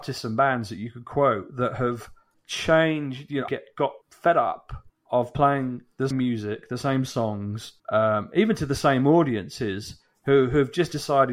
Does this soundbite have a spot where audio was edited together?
yes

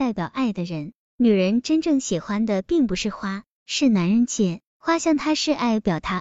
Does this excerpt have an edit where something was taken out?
yes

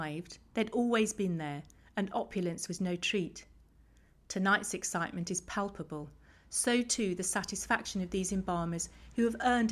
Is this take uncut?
yes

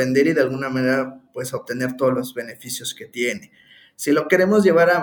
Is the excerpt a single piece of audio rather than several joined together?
yes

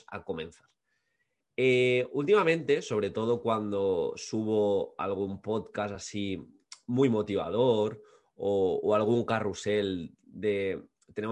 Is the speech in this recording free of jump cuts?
yes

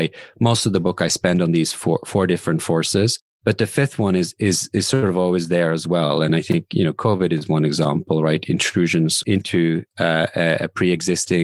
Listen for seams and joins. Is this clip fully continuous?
no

